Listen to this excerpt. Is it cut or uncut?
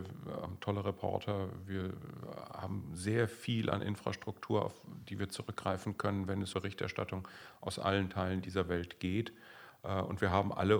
cut